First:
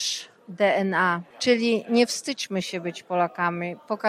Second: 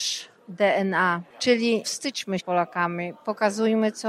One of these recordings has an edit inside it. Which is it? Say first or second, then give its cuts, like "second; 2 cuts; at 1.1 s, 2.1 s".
second; 2 cuts; at 1.8 s, 2.4 s